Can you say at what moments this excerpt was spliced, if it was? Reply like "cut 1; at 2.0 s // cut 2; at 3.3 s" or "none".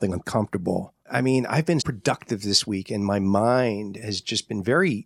cut 1; at 1.0 s // cut 2; at 1.8 s